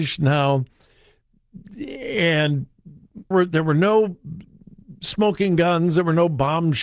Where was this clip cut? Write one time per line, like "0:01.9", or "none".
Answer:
0:03.3